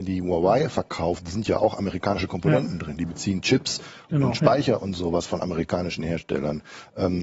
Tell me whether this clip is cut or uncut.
uncut